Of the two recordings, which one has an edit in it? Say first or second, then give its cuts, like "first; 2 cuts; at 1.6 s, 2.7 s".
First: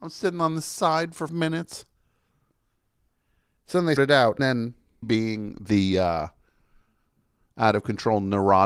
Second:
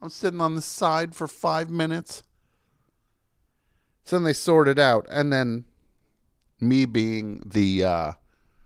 first; 4 cuts; at 1.3 s, 4.0 s, 4.4 s, 5.0 s